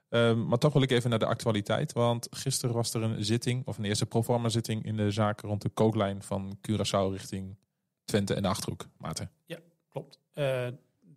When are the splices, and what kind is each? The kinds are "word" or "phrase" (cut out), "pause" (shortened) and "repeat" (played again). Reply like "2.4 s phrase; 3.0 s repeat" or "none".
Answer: none